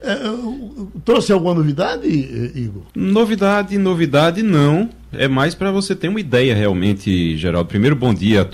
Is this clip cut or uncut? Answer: cut